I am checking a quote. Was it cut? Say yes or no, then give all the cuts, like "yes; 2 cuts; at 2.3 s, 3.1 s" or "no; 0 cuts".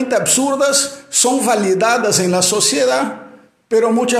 no; 0 cuts